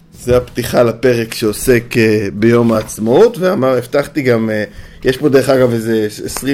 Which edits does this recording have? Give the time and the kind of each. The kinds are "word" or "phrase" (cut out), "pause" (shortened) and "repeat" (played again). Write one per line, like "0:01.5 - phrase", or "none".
none